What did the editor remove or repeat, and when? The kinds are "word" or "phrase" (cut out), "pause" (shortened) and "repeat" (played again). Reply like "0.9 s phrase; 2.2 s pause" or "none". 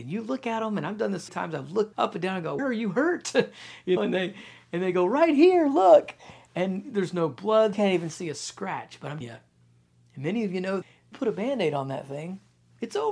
1.3 s word; 1.9 s word; 2.6 s word; 4.0 s word; 7.7 s word; 9.2 s word; 10.8 s word; 11.1 s word